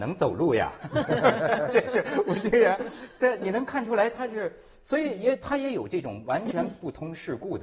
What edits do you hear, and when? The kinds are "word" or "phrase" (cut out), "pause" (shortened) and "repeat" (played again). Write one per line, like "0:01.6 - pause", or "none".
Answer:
none